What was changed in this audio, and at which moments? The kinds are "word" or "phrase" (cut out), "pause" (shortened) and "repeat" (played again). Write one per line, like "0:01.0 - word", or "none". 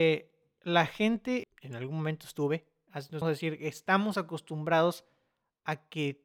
0:01.4 - phrase
0:03.2 - word